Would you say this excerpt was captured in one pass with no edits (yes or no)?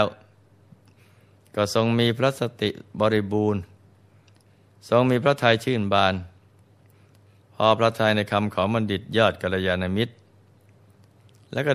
yes